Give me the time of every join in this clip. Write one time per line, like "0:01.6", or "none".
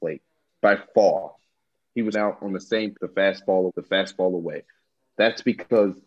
0:02.1
0:02.9
0:03.7